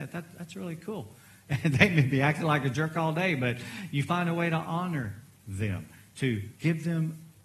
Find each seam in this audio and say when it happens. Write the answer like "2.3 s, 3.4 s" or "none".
6.6 s